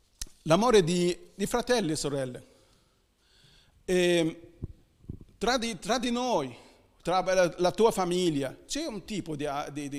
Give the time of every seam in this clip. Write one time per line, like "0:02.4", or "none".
none